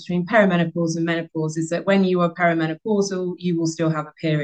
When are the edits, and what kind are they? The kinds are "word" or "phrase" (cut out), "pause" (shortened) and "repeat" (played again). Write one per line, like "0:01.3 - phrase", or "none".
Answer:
none